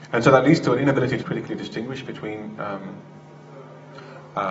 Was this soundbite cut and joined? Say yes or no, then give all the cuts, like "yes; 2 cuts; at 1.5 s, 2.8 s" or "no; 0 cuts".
yes; 1 cut; at 1.2 s